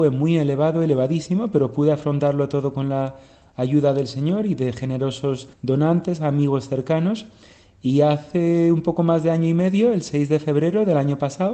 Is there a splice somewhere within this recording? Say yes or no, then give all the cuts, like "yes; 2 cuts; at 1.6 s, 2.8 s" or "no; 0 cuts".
yes; 1 cut; at 5.5 s